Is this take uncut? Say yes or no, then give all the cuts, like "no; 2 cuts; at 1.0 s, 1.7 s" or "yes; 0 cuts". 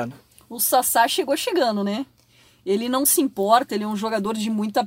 yes; 0 cuts